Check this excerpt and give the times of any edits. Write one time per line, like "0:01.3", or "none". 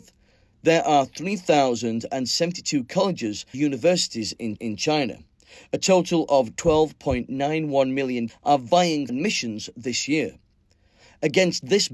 0:03.5
0:04.6
0:08.3
0:09.1